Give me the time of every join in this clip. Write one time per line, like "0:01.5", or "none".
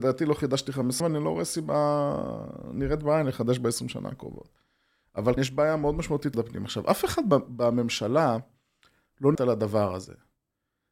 0:01.0
0:05.4
0:06.3
0:09.3